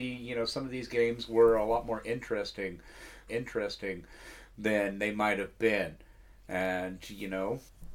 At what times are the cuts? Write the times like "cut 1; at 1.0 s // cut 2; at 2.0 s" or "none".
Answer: cut 1; at 3.3 s